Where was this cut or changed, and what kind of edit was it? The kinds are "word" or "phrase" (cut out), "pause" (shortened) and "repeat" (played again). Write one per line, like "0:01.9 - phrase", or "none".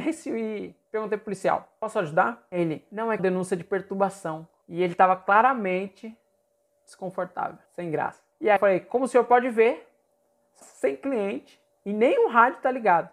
0:03.2 - phrase
0:07.7 - pause
0:08.6 - word
0:10.6 - phrase